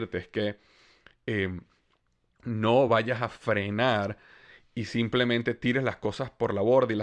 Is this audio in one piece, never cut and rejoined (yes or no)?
yes